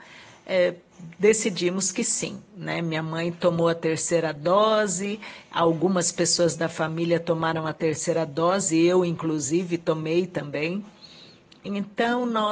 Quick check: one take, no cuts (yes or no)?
yes